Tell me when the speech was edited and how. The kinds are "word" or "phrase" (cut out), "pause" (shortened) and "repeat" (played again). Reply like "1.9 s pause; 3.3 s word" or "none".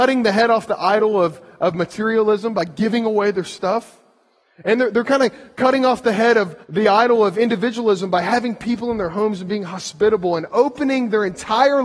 6.6 s pause